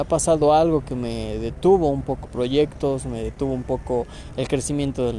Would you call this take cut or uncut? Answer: cut